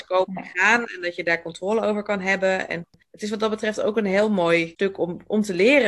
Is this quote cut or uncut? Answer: uncut